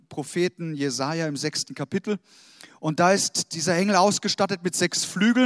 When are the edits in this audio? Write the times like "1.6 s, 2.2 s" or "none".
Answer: none